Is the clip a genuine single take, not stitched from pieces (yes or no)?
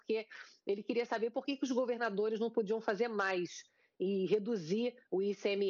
yes